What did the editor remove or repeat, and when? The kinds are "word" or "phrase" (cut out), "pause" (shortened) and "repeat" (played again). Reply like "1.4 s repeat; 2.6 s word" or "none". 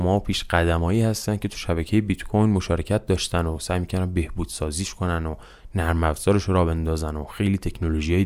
none

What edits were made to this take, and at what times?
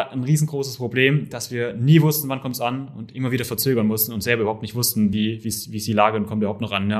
none

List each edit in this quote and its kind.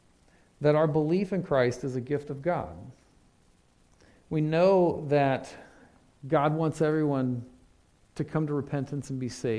none

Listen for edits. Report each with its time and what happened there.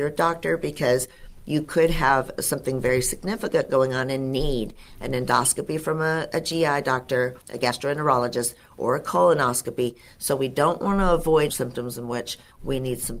7.4 s pause; 11.5 s phrase

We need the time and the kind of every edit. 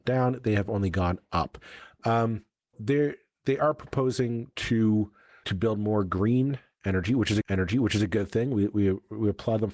2.7 s word; 5.4 s word; 7.4 s repeat

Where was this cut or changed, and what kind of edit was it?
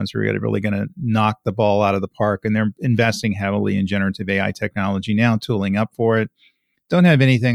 none

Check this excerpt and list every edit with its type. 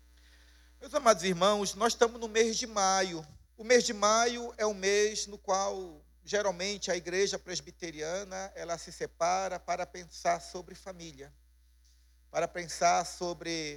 3.5 s pause

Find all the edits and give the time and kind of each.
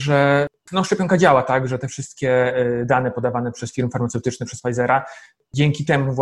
none

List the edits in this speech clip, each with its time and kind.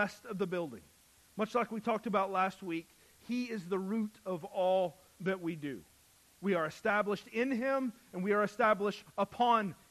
none

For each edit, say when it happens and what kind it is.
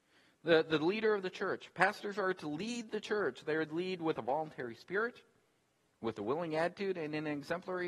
none

